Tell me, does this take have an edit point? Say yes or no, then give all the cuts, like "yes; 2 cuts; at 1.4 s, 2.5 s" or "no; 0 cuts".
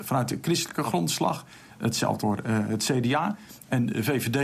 yes; 1 cut; at 2.2 s